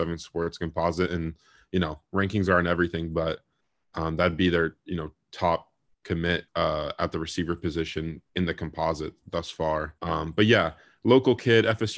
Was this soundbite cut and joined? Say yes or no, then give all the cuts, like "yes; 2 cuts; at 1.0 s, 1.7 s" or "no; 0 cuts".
yes; 3 cuts; at 6.5 s, 8.3 s, 10.0 s